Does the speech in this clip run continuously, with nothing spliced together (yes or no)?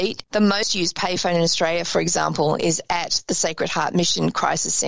yes